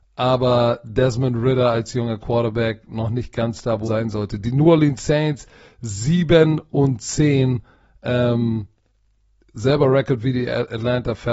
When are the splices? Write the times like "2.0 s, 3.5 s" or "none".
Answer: 3.9 s